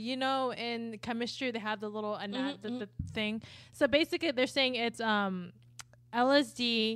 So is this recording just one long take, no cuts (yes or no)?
yes